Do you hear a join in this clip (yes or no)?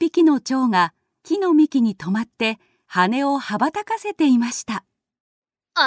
no